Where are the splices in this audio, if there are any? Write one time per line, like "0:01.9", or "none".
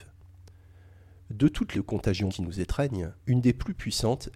0:01.7
0:02.3
0:03.2